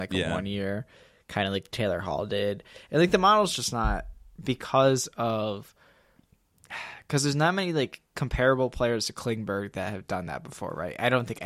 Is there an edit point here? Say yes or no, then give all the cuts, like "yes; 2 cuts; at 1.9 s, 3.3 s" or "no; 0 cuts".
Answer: no; 0 cuts